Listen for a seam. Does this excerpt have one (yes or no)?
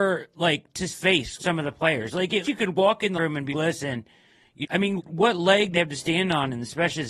yes